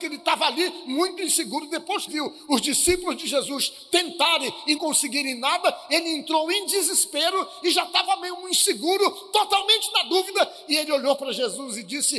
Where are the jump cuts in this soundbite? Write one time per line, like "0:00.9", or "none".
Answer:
0:02.1
0:04.8